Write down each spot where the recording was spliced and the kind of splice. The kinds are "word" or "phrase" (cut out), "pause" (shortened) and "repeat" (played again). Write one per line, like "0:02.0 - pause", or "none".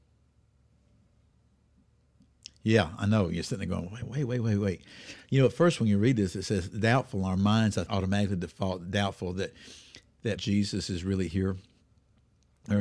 0:07.9 - word
0:10.4 - word